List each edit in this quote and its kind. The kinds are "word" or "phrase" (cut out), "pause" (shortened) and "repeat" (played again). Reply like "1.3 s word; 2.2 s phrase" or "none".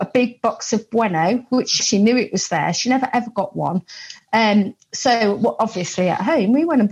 1.8 s word